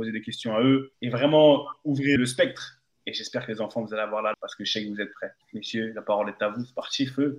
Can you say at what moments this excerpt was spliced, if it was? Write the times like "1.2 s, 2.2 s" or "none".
0.9 s, 2.2 s, 4.3 s, 5.4 s